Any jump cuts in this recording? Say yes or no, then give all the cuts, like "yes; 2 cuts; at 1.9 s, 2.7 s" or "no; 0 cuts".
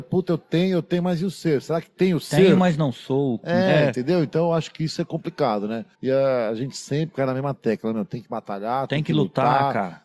yes; 1 cut; at 5.9 s